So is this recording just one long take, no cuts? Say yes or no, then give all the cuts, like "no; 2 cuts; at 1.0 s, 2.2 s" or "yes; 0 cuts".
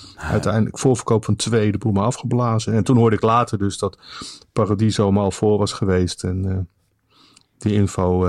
yes; 0 cuts